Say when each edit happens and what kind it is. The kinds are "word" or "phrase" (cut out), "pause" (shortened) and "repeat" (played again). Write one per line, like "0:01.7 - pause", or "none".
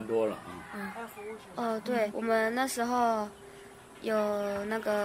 0:02.1 - word